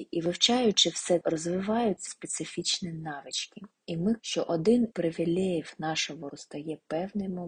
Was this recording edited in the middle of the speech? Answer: yes; 5 cuts; at 1.2 s, 2.1 s, 4.2 s, 4.9 s, 6.3 s

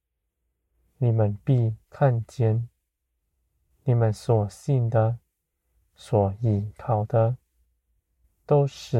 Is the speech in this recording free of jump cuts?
yes; 0 cuts

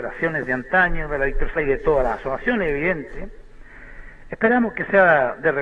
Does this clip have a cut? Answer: yes; 1 cut; at 1.6 s

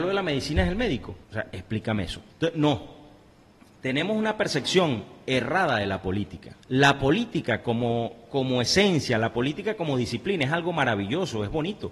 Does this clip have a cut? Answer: yes; 3 cuts; at 1.2 s, 2.3 s, 6.6 s

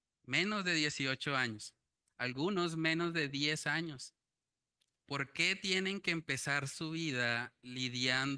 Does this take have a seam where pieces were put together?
no; 0 cuts

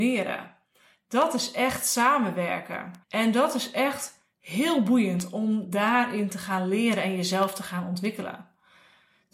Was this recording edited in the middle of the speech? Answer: yes; 1 cut; at 3.0 s

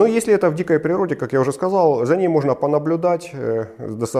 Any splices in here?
no; 0 cuts

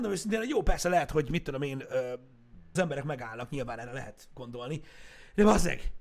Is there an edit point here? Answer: yes; 1 cut; at 2.8 s

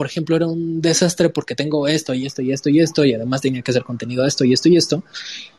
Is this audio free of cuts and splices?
yes; 0 cuts

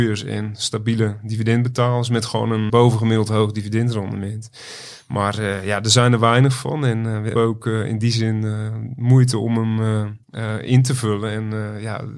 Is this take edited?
yes; 3 cuts; at 2.7 s, 7.4 s, 10.2 s

